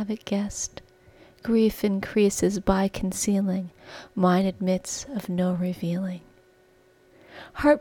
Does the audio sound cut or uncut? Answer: uncut